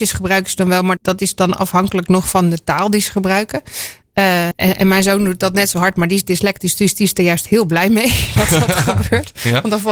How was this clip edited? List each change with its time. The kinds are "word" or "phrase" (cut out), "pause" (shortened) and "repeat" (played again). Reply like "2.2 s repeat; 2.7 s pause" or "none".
1.0 s word; 4.5 s word